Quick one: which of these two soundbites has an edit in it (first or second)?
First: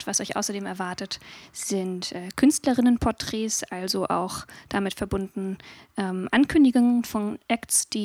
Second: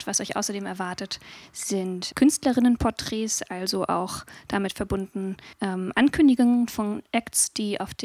second